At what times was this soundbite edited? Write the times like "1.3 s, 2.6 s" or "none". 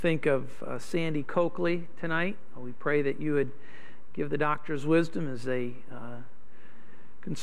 none